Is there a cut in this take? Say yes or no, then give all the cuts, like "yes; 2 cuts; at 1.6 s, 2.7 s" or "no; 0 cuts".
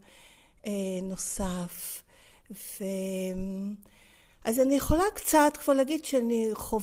no; 0 cuts